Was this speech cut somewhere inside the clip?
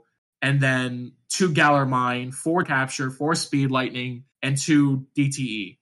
yes; 2 cuts; at 2.6 s, 4.3 s

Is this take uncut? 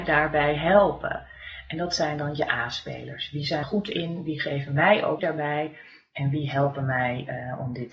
no; 2 cuts; at 3.6 s, 5.2 s

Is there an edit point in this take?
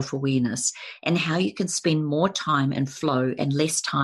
no; 0 cuts

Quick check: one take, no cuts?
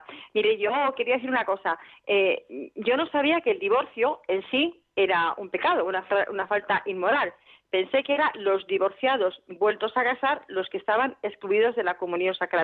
yes; 0 cuts

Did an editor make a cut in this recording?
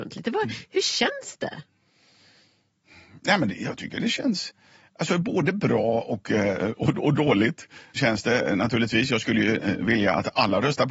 no; 0 cuts

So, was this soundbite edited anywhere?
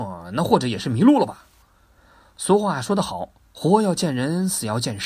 no; 0 cuts

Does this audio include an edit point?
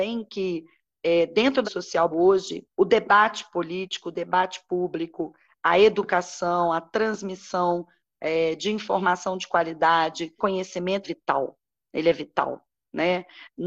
yes; 5 cuts; at 1.6 s, 2.1 s, 2.7 s, 10.4 s, 11.0 s

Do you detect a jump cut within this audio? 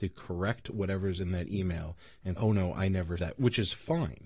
yes; 2 cuts; at 2.4 s, 3.2 s

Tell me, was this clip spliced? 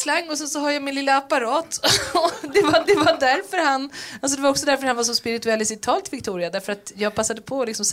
yes; 1 cut; at 2.8 s

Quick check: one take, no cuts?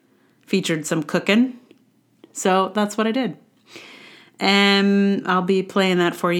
yes; 0 cuts

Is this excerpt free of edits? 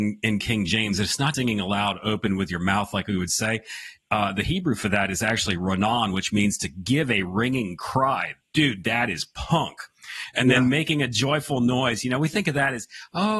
no; 1 cut; at 1.3 s

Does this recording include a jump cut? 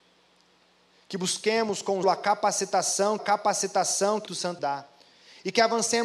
yes; 4 cuts; at 2.0 s, 3.2 s, 4.3 s, 4.6 s

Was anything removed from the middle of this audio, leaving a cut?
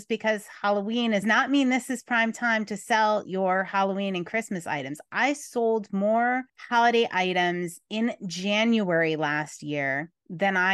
yes; 2 cuts; at 1.2 s, 6.5 s

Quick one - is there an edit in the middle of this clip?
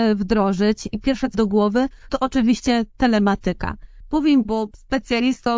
yes; 4 cuts; at 0.9 s, 1.3 s, 2.1 s, 4.4 s

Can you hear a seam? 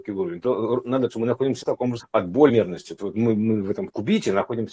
yes; 5 cuts; at 1.1 s, 1.6 s, 2.0 s, 2.5 s, 3.0 s

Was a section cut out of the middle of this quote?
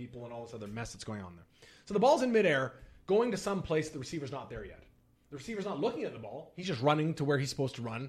no; 0 cuts

